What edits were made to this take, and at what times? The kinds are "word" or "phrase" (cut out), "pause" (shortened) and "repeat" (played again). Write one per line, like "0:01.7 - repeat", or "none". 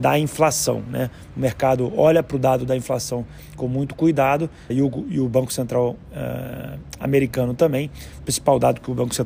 0:04.7 - word